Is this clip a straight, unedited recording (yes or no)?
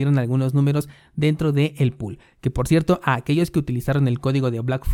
yes